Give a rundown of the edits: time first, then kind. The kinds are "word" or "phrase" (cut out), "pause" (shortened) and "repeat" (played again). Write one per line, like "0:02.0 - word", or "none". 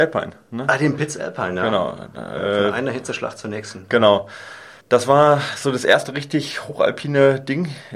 0:04.8 - pause